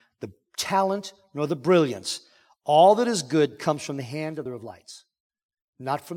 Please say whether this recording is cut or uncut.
cut